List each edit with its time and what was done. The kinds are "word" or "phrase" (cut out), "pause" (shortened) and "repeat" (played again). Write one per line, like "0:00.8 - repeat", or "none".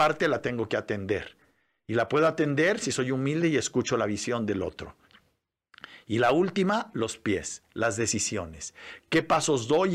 none